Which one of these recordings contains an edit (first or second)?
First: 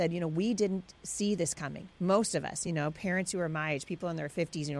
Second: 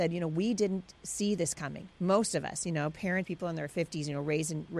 second